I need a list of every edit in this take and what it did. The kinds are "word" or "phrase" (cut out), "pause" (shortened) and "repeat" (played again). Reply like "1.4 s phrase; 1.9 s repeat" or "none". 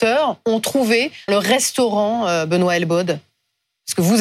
1.3 s word

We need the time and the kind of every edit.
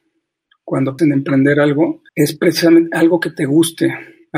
1.0 s word; 2.1 s pause

